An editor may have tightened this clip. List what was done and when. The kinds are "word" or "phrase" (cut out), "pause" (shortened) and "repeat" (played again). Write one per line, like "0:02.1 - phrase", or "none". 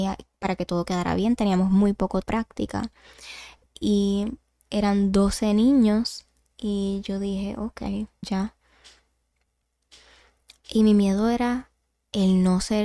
0:02.2 - phrase
0:08.2 - word